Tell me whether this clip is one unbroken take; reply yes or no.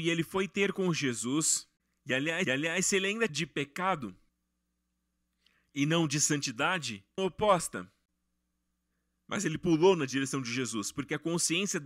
no